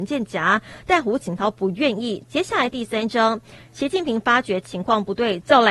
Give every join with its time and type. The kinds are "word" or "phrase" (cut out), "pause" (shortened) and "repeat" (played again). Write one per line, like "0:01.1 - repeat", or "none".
none